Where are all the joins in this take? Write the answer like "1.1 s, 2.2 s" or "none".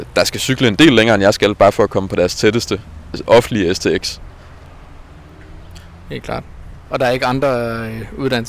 6.8 s